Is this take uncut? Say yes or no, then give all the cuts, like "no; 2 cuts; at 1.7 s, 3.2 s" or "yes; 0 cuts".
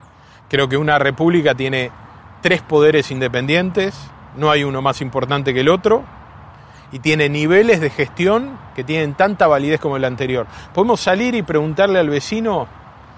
yes; 0 cuts